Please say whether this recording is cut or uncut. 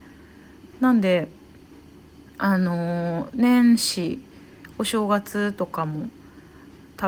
uncut